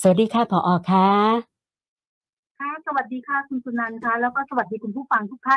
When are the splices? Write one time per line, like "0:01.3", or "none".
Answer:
none